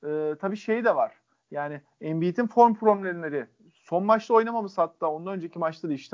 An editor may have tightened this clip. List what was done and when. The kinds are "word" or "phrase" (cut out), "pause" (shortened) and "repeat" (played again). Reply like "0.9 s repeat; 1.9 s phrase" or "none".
none